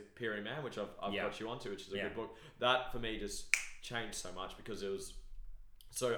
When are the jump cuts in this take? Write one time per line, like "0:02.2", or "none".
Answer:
0:01.9